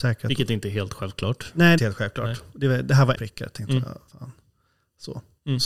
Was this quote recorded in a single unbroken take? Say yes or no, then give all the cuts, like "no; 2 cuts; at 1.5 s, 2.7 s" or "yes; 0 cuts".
no; 3 cuts; at 1.8 s, 3.1 s, 4.1 s